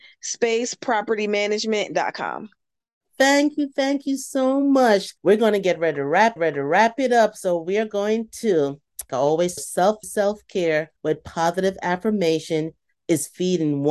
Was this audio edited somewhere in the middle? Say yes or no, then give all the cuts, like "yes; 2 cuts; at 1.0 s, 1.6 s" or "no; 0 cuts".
yes; 6 cuts; at 5.2 s, 6.4 s, 9.1 s, 9.6 s, 10.0 s, 11.0 s